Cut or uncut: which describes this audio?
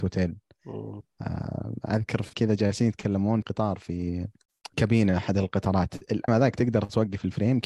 cut